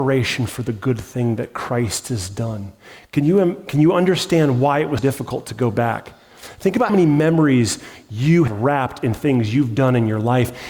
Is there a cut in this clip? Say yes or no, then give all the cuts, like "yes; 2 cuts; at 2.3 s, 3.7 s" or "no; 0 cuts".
yes; 3 cuts; at 5.0 s, 6.9 s, 8.5 s